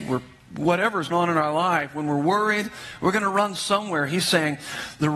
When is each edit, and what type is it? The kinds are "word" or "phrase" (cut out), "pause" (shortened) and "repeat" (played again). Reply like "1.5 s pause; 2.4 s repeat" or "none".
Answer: 1.1 s word